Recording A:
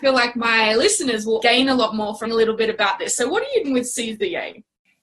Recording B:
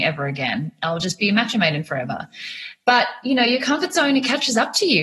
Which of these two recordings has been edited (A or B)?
A